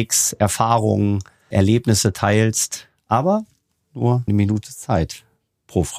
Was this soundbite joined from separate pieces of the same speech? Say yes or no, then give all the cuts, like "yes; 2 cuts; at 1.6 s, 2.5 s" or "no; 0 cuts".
yes; 2 cuts; at 1.5 s, 4.3 s